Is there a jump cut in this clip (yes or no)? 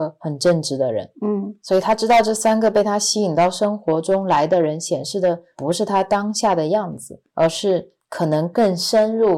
no